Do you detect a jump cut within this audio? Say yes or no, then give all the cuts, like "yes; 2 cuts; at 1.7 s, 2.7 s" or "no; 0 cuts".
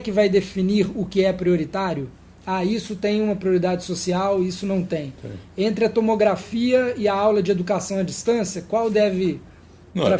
no; 0 cuts